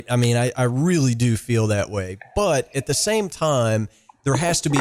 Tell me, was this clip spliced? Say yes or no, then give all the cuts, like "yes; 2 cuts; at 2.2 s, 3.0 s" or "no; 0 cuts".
no; 0 cuts